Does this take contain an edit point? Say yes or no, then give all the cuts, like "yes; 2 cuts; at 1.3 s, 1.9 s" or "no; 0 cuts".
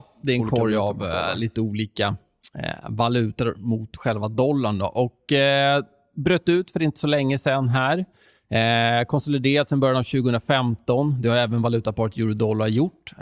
no; 0 cuts